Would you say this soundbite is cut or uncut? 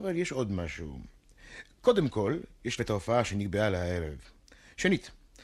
cut